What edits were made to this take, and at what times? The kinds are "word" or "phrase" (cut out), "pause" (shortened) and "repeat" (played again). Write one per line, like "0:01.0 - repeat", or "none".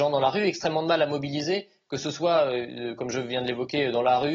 none